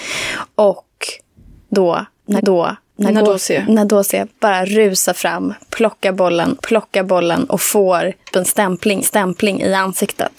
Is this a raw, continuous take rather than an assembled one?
no; 5 cuts; at 2.4 s, 4.3 s, 6.6 s, 8.3 s, 9.0 s

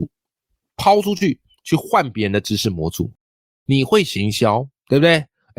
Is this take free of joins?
yes; 0 cuts

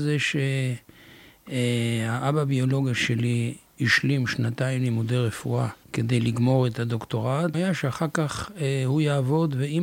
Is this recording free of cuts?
no; 2 cuts; at 5.8 s, 7.5 s

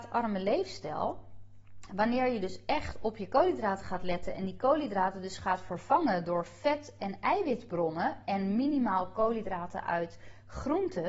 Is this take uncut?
yes; 0 cuts

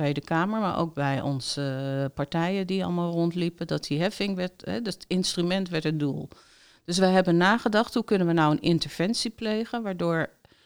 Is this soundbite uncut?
yes; 0 cuts

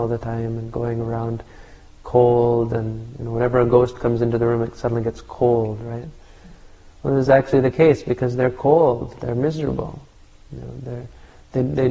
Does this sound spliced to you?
no; 0 cuts

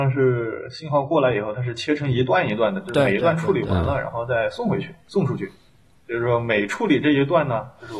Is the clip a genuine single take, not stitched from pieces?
yes; 0 cuts

